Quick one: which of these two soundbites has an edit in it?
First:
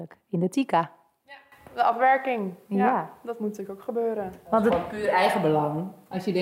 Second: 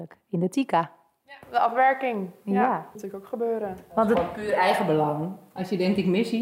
second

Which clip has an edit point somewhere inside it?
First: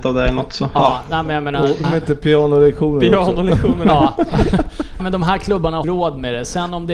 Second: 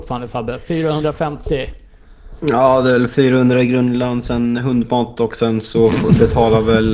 first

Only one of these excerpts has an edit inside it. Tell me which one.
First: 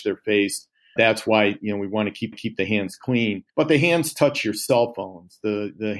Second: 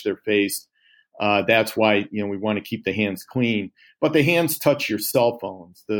first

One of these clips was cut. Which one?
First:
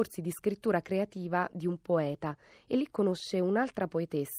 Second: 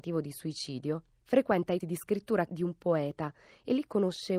second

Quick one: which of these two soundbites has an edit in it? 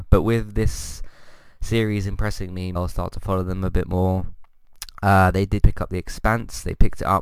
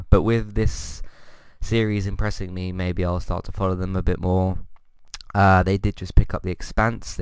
first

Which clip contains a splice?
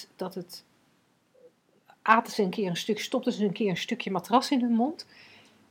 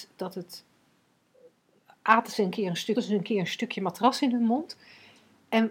second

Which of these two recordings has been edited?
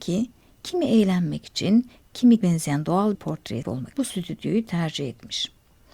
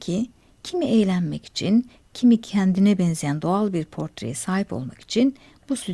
first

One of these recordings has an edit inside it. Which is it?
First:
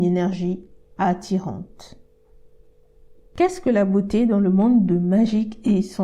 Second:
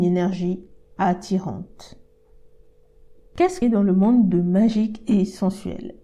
second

